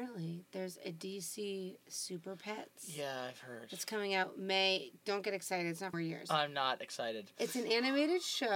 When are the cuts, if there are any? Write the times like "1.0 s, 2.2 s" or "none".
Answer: 5.9 s